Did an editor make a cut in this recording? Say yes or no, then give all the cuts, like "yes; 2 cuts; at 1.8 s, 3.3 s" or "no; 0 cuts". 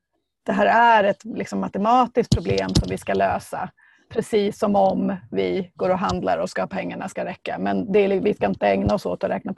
no; 0 cuts